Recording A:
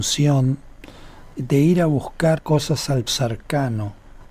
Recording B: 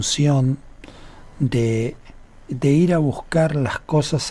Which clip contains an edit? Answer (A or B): A